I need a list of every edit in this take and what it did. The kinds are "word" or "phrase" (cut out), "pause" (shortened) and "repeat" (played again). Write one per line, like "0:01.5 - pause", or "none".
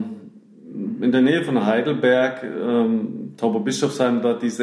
none